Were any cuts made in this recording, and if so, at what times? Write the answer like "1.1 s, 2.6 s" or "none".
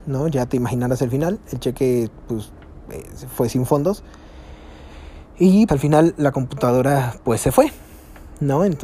5.7 s